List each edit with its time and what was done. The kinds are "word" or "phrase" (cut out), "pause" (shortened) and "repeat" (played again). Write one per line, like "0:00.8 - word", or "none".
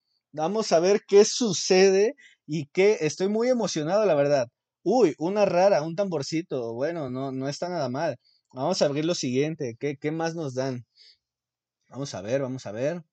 none